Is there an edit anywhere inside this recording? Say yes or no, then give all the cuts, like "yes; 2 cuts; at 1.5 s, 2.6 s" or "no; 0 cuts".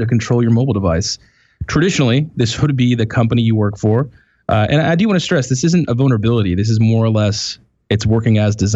no; 0 cuts